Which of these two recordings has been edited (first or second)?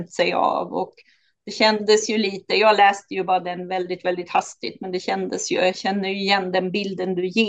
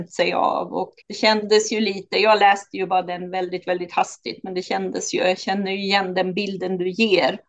second